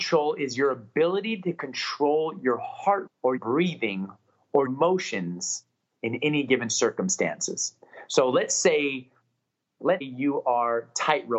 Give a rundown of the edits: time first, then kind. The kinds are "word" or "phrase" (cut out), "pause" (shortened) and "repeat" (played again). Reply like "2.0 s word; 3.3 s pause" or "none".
3.1 s word; 3.4 s word; 4.7 s word; 10.0 s word

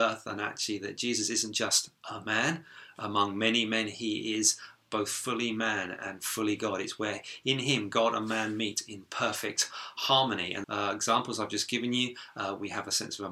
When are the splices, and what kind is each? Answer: 10.6 s phrase

